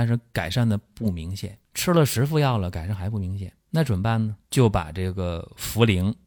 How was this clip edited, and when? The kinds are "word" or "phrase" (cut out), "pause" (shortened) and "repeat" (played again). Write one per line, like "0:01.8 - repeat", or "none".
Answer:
0:01.6 - pause
0:03.6 - pause
0:04.4 - pause